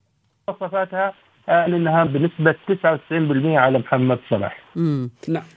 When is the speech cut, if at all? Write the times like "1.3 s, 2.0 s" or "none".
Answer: 1.7 s, 2.1 s